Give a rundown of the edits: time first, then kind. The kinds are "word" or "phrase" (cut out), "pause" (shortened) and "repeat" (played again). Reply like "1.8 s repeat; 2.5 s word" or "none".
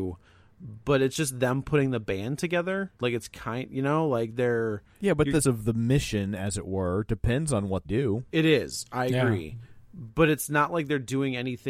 3.0 s pause; 4.9 s pause; 5.4 s phrase; 7.8 s word